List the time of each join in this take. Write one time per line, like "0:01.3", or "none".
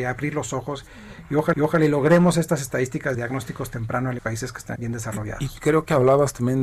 0:01.5
0:03.1
0:04.2
0:04.8